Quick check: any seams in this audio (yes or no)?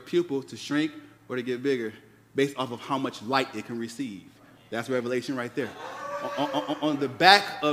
no